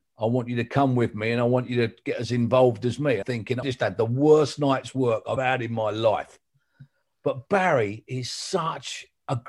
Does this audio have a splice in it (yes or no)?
yes